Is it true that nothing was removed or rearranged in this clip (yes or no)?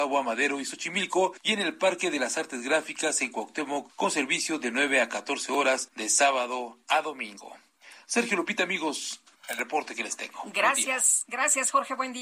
no